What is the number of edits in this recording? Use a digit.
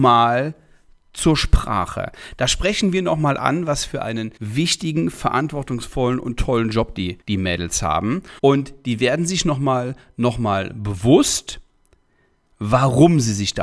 3